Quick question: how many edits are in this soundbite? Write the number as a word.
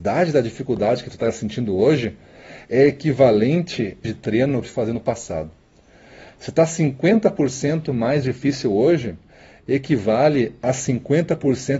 two